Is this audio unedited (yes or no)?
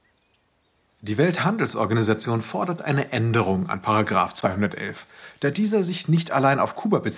yes